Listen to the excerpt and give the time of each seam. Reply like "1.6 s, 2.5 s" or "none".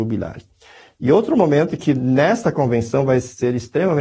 none